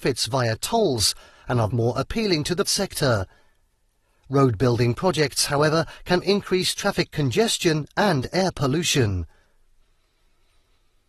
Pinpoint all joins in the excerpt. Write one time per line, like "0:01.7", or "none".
0:01.7
0:02.6
0:06.2

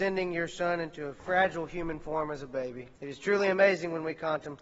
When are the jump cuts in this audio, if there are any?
0:03.0

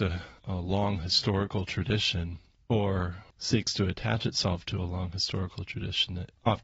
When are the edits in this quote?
none

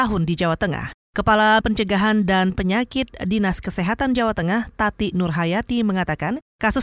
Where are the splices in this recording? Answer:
0:01.6
0:02.5

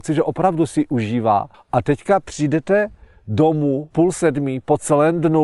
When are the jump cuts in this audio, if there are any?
0:01.5
0:03.9

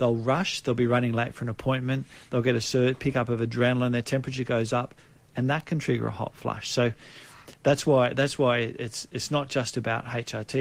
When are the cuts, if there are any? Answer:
none

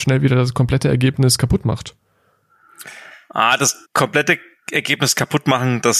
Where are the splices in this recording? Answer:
0:03.8

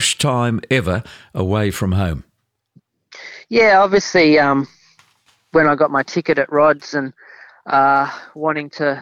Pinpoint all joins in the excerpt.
none

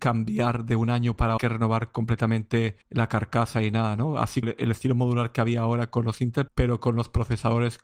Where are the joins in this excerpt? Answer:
0:01.4
0:02.8
0:04.4
0:06.5

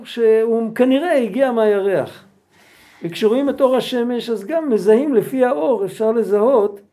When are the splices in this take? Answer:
none

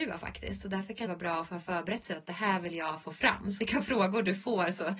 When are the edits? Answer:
0:01.1
0:03.6

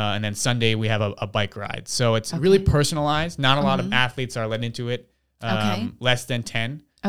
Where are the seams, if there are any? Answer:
none

